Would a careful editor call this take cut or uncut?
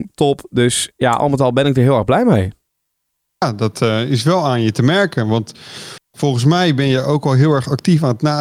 uncut